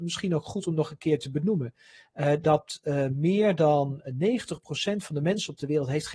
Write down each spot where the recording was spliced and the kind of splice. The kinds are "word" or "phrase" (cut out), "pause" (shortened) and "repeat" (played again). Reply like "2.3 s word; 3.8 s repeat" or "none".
none